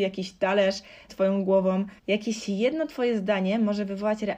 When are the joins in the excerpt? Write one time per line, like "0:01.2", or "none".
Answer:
0:01.1
0:02.0